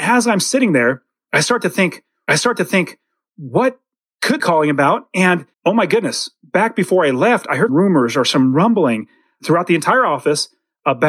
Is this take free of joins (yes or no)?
no